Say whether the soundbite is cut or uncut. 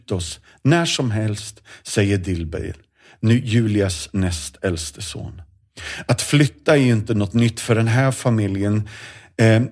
uncut